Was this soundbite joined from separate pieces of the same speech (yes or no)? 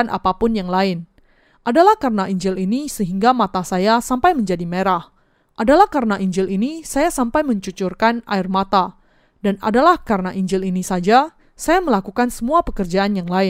no